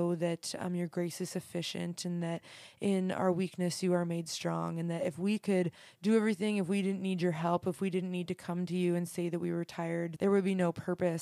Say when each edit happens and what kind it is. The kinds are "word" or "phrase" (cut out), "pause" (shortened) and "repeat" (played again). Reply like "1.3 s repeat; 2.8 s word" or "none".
10.2 s word